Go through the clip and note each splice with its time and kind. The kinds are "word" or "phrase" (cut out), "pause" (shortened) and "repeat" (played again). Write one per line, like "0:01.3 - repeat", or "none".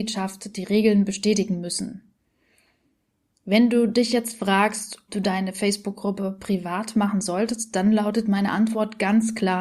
0:05.1 - word